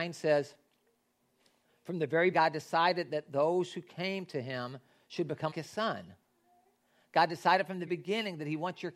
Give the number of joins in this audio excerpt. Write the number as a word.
three